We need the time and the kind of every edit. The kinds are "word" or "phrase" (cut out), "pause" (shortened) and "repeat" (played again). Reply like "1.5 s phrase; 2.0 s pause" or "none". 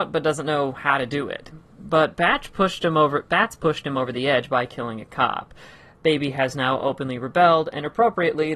none